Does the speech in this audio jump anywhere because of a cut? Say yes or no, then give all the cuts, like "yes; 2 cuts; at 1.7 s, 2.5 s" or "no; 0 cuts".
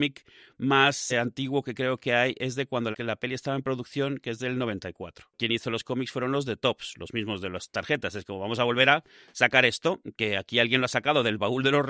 yes; 2 cuts; at 1.1 s, 2.9 s